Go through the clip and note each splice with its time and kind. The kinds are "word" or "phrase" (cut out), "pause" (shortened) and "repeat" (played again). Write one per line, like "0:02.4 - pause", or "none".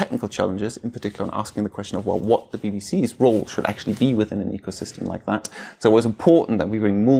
none